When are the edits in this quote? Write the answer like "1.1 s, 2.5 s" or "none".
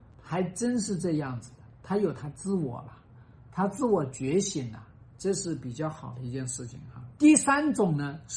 none

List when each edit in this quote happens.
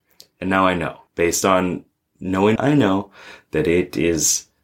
1.1 s, 2.6 s

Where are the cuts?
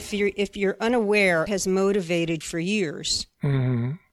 1.5 s, 2.4 s

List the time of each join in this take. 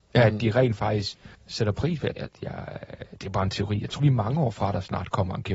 1.3 s, 2.2 s, 4.0 s

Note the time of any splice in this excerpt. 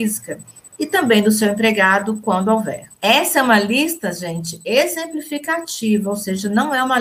3.0 s

